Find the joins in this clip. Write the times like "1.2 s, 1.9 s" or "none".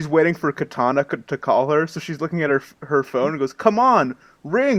none